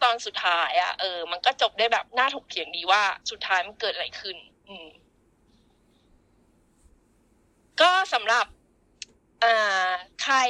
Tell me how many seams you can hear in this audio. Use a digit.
2